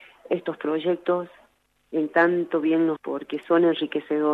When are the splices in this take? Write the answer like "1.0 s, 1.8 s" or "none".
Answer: 2.1 s, 3.0 s